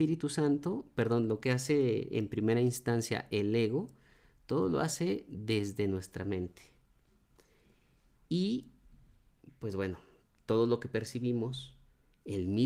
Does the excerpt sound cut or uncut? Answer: uncut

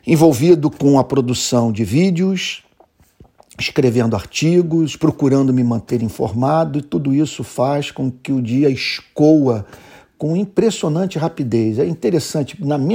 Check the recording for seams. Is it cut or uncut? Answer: uncut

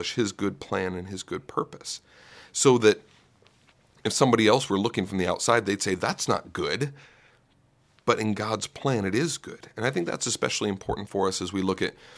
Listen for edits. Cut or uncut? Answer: uncut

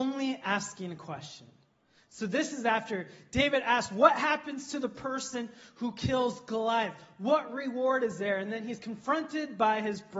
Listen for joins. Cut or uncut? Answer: uncut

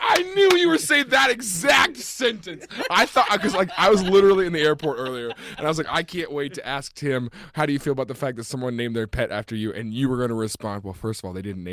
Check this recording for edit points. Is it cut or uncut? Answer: uncut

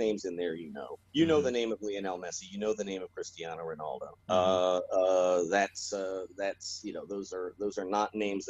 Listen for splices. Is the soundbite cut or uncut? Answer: cut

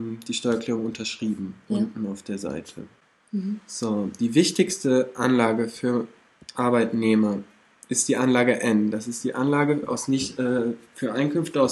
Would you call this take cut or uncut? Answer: uncut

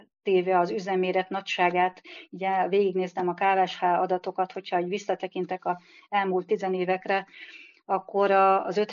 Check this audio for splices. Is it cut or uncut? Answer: uncut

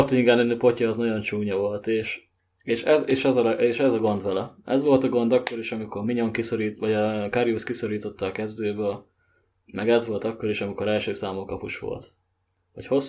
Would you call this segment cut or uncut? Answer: uncut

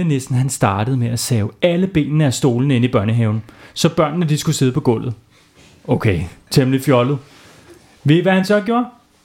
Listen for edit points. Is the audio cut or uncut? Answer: uncut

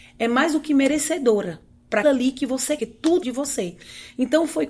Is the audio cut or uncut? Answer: cut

